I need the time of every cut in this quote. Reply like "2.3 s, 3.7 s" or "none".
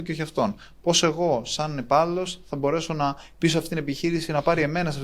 none